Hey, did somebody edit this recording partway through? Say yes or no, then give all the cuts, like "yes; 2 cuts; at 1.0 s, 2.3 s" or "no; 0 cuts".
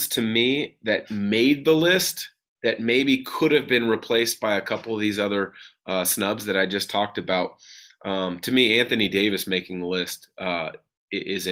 no; 0 cuts